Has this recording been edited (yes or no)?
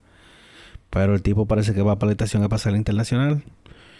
no